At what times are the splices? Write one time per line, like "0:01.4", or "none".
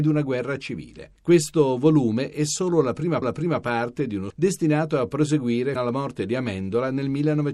0:03.2
0:04.3
0:05.8